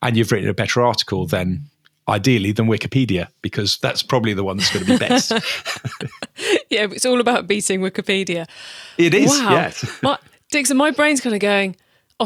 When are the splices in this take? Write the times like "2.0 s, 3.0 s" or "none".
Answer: none